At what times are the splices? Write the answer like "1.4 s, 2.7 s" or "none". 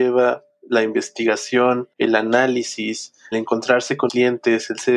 1.9 s, 3.3 s, 4.1 s